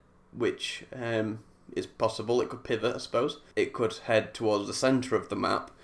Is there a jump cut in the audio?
no; 0 cuts

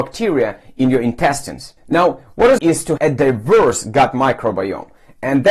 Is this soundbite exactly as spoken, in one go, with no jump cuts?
no; 3 cuts; at 1.8 s, 2.6 s, 3.0 s

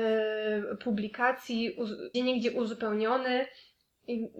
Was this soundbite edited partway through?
yes; 1 cut; at 2.1 s

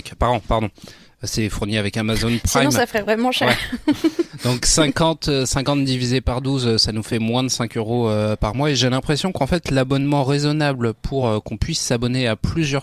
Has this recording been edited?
no; 0 cuts

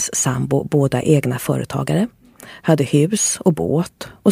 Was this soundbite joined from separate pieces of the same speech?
no; 0 cuts

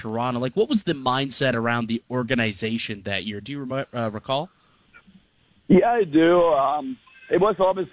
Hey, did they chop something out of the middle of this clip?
no; 0 cuts

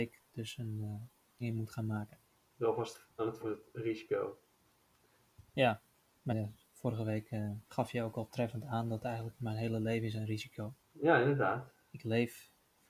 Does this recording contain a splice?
yes; 7 cuts; at 1.4 s, 2.3 s, 3.4 s, 6.3 s, 7.6 s, 9.4 s, 10.8 s

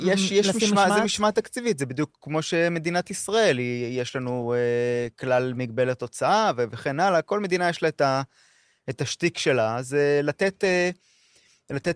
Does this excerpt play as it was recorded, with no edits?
yes; 0 cuts

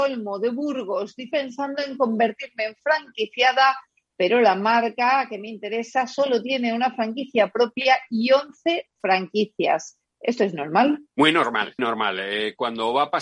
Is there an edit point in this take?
yes; 3 cuts; at 1.3 s, 11.1 s, 11.8 s

